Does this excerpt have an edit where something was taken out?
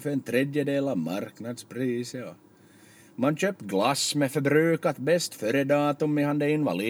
no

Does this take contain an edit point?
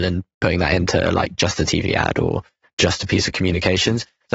no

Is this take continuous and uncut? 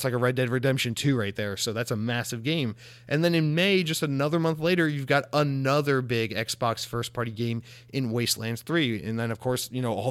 yes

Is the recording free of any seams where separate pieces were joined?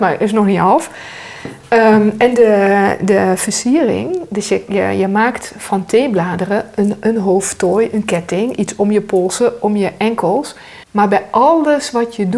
no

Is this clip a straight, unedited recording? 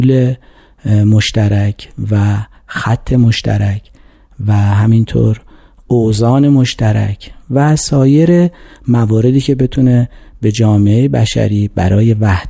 yes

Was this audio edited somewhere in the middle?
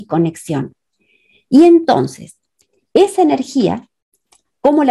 no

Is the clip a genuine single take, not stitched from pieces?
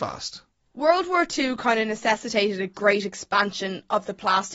yes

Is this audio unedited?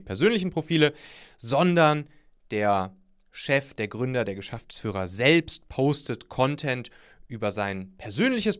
yes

